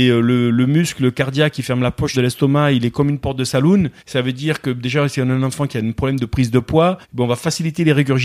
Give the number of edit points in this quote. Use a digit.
3